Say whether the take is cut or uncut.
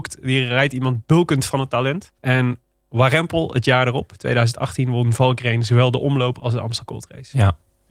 cut